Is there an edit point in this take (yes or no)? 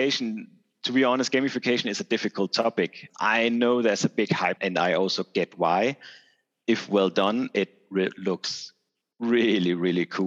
yes